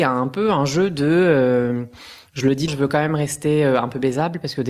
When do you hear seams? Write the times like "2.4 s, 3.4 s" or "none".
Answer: 2.7 s